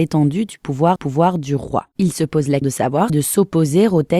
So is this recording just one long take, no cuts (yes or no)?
no